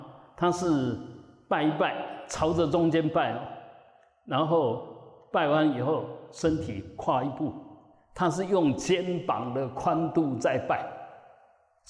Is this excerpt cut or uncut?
uncut